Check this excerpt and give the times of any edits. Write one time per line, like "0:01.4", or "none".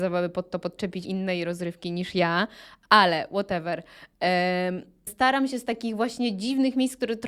0:01.0
0:05.1

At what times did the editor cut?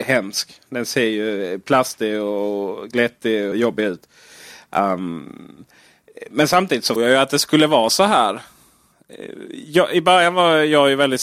0:03.5
0:07.0

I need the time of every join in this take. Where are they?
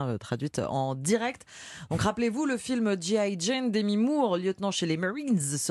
none

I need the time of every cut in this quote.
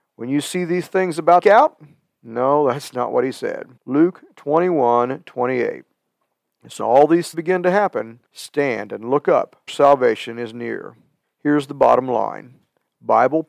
0:01.4
0:03.8
0:06.8
0:07.3
0:08.3
0:09.7
0:11.2

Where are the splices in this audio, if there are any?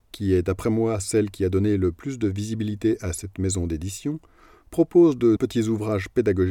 0:05.4

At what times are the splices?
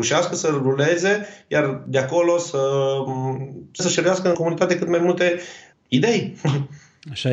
0:03.8
0:04.3
0:05.7

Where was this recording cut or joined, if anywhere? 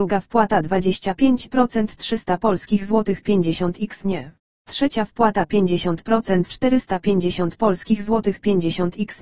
0:04.5

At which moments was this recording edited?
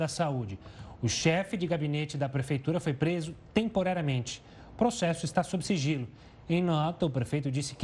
none

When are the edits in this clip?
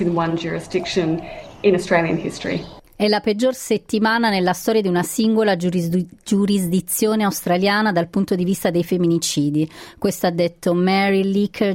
0:02.8

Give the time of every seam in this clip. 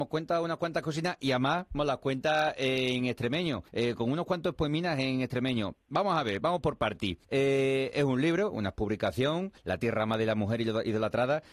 0:03.7
0:07.2
0:09.6

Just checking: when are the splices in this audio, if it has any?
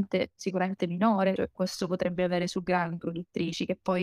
0:01.4
0:03.0

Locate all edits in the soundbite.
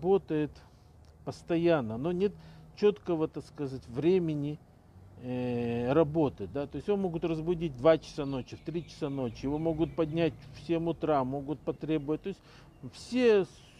none

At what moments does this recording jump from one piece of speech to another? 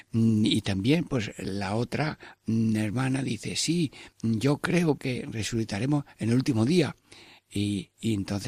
0:05.0

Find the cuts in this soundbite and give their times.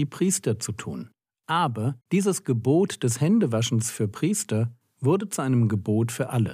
0:02.0

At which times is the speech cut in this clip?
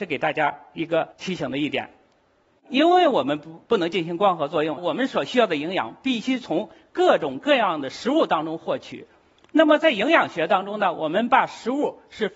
0:01.1
0:04.8

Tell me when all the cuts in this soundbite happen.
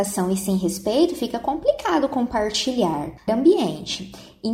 0:03.3

